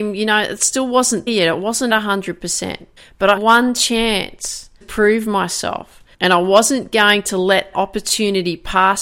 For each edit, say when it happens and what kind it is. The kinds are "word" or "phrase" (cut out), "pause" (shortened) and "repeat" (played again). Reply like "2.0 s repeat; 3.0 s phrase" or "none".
1.3 s word; 1.9 s word; 3.0 s pause; 3.4 s word; 4.8 s word; 6.1 s pause; 7.7 s word